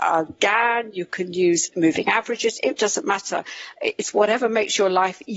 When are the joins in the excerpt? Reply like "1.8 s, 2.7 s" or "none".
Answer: 2.8 s